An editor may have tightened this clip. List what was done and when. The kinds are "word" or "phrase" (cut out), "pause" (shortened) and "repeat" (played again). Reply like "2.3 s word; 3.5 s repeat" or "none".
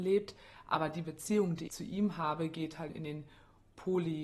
1.7 s word; 2.9 s word